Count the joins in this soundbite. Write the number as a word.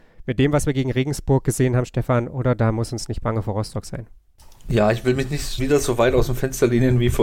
one